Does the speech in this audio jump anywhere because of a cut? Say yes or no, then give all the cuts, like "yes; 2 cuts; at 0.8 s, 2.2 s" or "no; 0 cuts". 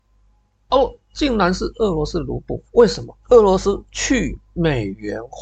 yes; 3 cuts; at 2.7 s, 3.2 s, 3.9 s